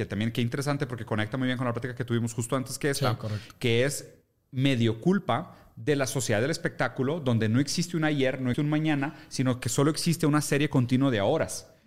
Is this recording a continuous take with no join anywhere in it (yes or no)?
no